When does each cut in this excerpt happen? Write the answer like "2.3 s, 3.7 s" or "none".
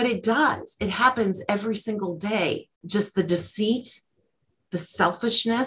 2.8 s